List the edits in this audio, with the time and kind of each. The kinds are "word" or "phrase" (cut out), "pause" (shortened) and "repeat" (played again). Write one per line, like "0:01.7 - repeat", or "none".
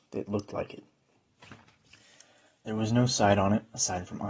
none